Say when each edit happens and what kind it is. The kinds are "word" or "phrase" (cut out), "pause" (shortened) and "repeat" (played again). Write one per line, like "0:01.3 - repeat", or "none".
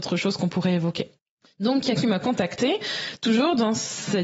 0:01.2 - pause
0:02.0 - word

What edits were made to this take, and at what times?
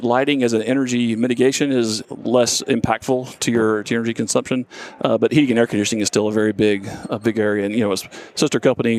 0:02.0 - word

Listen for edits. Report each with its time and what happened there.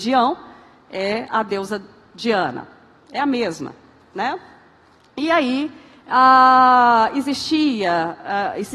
none

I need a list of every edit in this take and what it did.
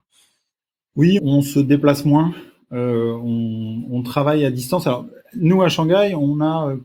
0:01.2 - word

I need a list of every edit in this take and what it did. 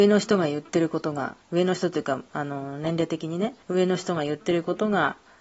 0:01.4 - pause
0:03.6 - pause

